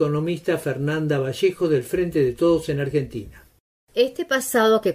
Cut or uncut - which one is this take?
uncut